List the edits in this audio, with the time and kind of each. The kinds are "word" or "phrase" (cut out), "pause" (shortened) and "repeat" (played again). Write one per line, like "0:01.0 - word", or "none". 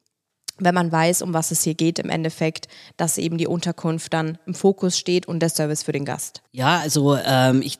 none